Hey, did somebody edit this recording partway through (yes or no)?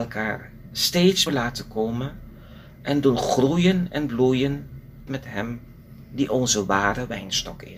yes